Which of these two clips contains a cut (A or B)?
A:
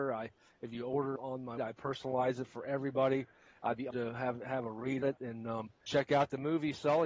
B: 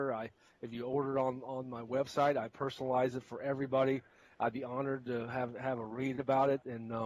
A